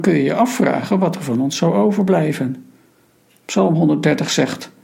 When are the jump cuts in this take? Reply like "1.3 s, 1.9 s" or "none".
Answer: none